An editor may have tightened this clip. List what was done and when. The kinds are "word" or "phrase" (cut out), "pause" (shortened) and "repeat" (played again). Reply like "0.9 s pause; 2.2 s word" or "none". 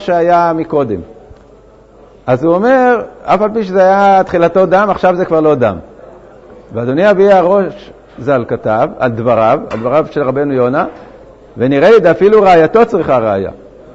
none